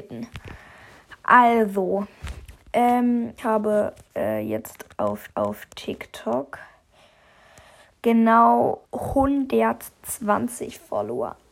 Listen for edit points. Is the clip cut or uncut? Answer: cut